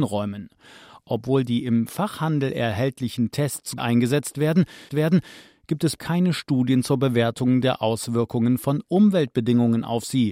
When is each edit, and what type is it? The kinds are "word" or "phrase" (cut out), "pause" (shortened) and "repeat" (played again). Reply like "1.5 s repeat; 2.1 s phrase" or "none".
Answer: 3.8 s word; 4.9 s repeat; 6.0 s word